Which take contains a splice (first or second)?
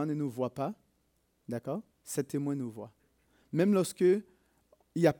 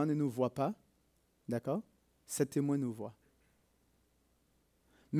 first